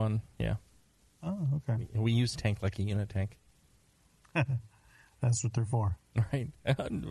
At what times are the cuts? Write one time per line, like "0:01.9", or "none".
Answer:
0:02.3